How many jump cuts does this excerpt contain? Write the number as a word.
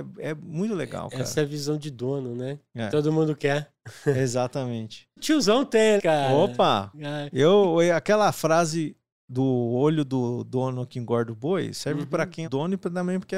three